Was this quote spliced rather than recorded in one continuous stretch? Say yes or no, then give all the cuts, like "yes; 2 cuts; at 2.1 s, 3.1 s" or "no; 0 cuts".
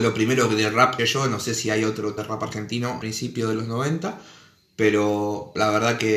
yes; 3 cuts; at 1.0 s, 2.2 s, 3.0 s